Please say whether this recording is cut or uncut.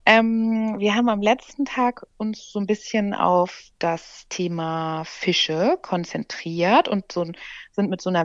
cut